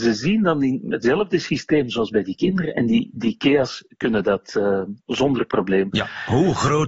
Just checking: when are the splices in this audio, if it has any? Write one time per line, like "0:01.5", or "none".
none